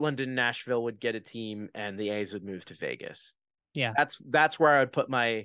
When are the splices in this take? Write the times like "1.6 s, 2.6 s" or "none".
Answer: none